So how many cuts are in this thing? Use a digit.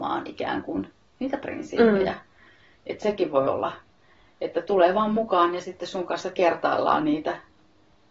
0